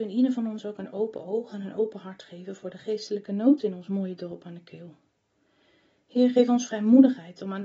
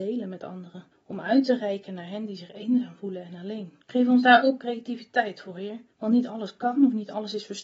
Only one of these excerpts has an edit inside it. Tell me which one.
second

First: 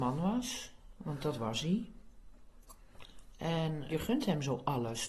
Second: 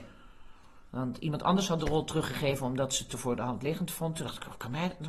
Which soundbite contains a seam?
first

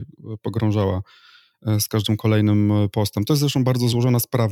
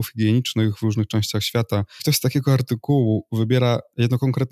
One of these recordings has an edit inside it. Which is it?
second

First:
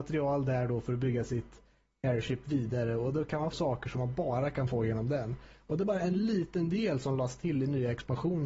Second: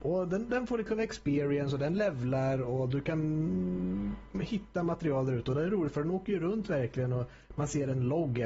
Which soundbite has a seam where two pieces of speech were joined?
first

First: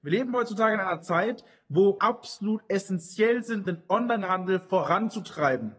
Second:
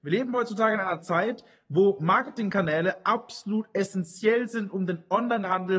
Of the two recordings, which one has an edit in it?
first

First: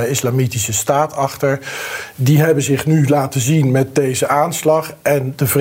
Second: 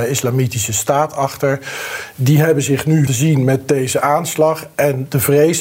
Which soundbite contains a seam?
second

